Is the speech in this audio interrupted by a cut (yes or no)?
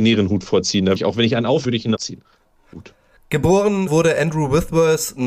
yes